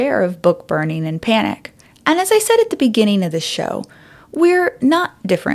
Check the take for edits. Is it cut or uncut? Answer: cut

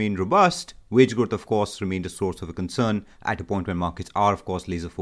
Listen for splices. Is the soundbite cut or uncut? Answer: uncut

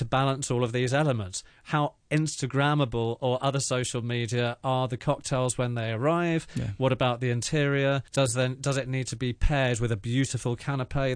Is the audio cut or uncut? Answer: cut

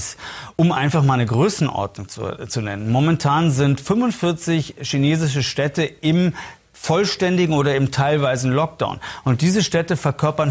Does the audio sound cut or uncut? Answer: uncut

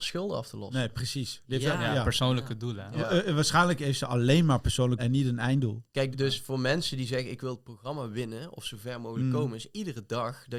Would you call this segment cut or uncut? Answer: cut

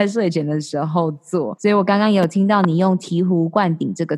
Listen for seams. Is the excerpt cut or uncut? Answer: cut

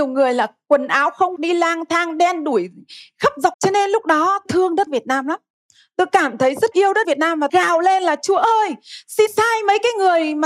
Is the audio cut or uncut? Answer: cut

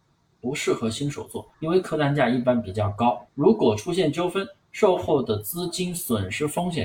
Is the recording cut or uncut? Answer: cut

